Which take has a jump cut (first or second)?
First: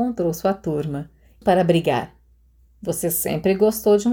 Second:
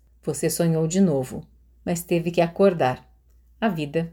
first